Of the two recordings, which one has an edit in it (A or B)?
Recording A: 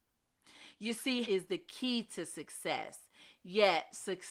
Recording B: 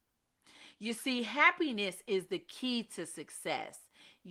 A